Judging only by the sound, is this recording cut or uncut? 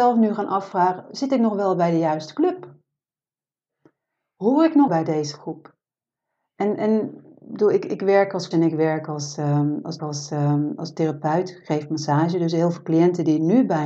cut